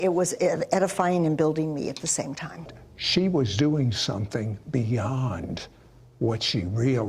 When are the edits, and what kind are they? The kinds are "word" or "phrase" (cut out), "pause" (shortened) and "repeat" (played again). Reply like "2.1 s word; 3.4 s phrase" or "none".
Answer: none